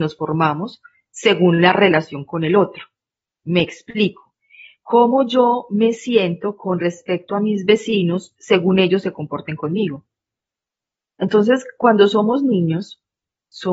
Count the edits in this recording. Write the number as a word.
zero